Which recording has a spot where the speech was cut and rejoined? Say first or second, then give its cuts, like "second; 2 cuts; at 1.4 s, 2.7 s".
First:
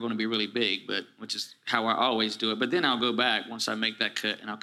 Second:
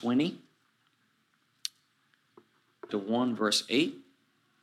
second; 1 cut; at 2.9 s